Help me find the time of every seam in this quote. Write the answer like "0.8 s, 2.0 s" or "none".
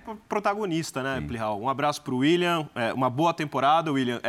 none